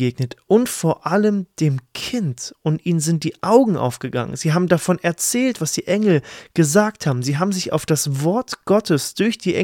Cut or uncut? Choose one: uncut